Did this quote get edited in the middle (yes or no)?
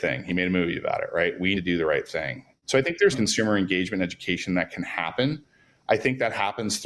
yes